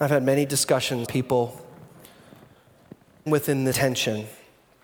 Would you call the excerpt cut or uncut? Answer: cut